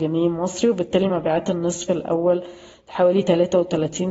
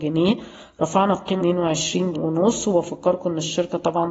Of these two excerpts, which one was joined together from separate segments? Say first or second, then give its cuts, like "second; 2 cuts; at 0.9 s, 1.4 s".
second; 2 cuts; at 1.4 s, 2.1 s